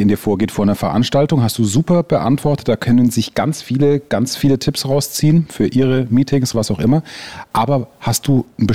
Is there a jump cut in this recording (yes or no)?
yes